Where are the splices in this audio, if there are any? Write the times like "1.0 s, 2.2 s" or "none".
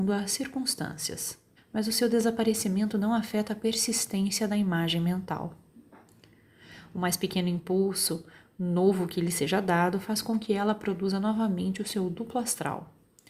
1.6 s